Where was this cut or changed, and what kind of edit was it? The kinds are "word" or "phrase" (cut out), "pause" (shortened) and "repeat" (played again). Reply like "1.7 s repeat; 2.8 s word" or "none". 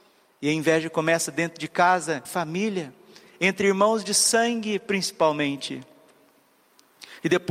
2.2 s word